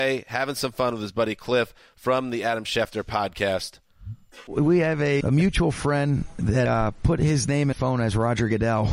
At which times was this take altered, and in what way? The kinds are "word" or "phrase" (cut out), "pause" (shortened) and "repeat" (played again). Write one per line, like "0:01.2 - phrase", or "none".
0:05.2 - word
0:06.7 - word
0:07.7 - word